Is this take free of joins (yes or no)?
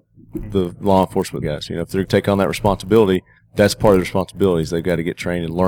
no